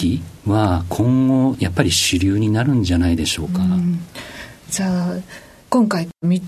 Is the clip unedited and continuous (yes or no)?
yes